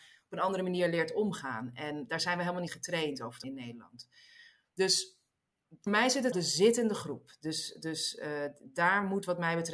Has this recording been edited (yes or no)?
yes